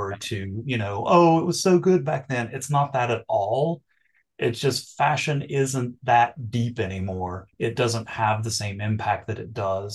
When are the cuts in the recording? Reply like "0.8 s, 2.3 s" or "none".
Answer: 7.5 s